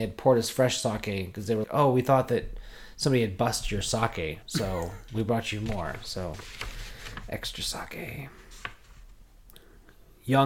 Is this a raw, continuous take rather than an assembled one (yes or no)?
no